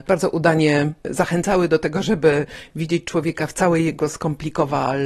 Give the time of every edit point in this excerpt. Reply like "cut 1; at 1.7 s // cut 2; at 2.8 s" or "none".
none